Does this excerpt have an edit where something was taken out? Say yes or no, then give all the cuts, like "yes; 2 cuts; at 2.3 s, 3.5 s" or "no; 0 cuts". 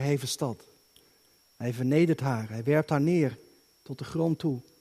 no; 0 cuts